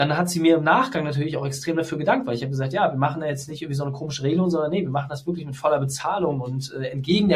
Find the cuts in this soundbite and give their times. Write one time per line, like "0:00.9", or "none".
none